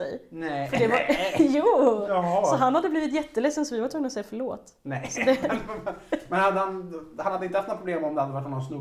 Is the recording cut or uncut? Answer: uncut